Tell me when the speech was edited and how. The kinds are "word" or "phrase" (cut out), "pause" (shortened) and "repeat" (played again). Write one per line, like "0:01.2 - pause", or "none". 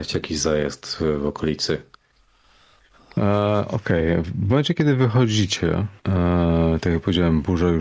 0:06.0 - pause